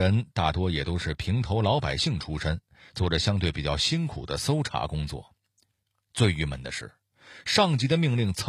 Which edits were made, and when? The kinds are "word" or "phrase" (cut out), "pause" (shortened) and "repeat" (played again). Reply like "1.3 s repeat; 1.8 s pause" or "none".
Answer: none